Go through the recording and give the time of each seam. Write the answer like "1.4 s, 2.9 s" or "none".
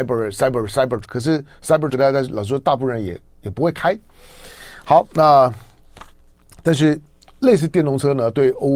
1.0 s, 1.9 s